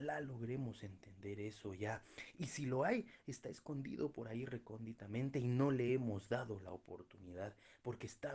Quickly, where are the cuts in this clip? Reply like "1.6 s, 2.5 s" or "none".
none